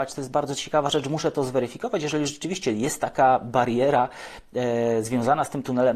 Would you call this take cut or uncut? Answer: uncut